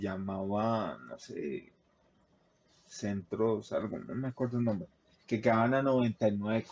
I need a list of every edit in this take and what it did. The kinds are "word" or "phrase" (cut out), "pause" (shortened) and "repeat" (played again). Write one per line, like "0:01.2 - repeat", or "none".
none